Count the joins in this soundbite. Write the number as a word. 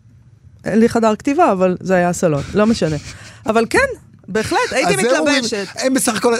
zero